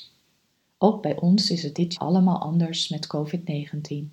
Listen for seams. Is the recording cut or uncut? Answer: cut